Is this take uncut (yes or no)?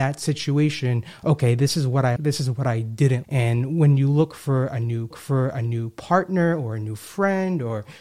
no